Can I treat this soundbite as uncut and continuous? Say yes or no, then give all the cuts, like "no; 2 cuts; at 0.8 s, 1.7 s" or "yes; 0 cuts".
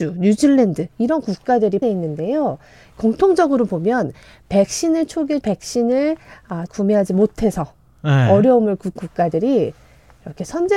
no; 4 cuts; at 1.8 s, 5.4 s, 6.7 s, 9.0 s